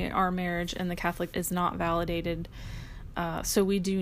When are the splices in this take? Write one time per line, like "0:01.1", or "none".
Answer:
0:01.3